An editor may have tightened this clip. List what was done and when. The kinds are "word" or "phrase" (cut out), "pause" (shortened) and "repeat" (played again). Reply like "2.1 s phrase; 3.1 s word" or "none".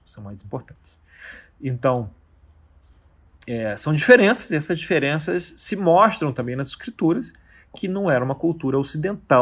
none